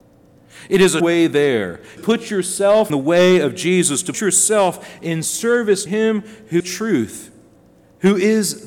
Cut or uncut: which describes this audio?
cut